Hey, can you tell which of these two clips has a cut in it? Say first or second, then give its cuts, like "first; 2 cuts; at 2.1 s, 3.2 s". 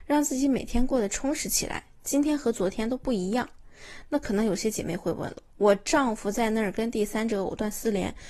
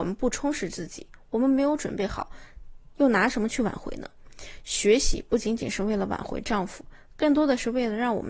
first; 1 cut; at 5.5 s